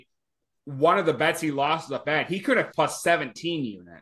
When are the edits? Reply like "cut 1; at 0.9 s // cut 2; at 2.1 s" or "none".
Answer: cut 1; at 2.0 s // cut 2; at 2.7 s